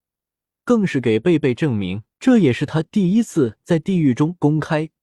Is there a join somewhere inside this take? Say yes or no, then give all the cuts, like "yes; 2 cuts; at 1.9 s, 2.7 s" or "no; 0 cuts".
yes; 1 cut; at 2.1 s